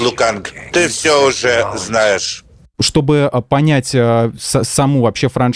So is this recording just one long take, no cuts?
yes; 0 cuts

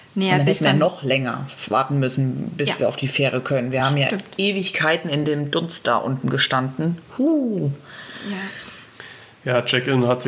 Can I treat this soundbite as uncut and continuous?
yes; 0 cuts

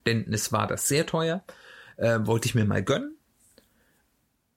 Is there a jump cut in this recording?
no; 0 cuts

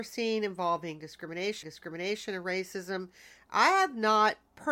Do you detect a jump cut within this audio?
yes; 1 cut; at 1.6 s

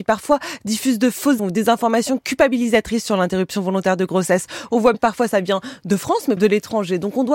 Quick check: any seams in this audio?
yes; 3 cuts; at 1.4 s, 4.9 s, 6.4 s

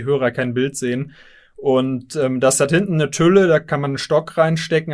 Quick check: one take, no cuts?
yes; 0 cuts

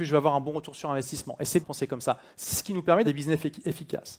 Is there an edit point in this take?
yes; 2 cuts; at 1.6 s, 3.0 s

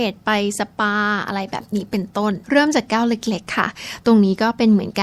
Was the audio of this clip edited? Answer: yes; 1 cut; at 2.4 s

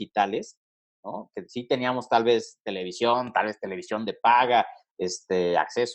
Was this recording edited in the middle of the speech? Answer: no; 0 cuts

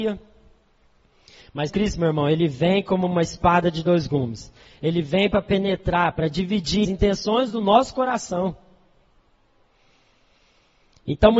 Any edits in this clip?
yes; 2 cuts; at 1.7 s, 6.8 s

